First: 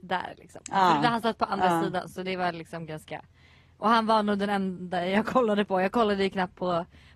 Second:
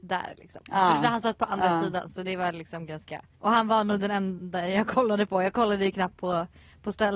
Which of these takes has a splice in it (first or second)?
second